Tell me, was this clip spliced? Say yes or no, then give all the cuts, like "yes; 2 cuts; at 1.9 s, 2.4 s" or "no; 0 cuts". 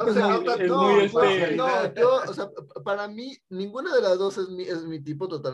no; 0 cuts